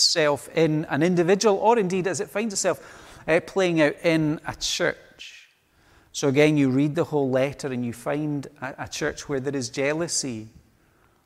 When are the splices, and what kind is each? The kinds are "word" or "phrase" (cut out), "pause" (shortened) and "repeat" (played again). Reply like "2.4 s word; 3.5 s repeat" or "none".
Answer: none